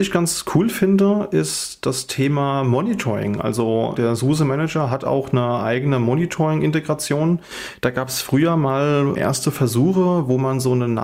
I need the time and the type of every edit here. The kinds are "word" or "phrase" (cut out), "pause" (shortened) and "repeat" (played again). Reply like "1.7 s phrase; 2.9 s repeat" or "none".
3.9 s word; 9.1 s word